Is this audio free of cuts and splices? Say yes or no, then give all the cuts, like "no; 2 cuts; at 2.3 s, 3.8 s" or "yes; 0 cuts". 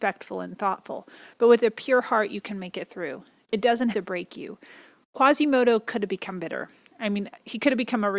no; 1 cut; at 3.9 s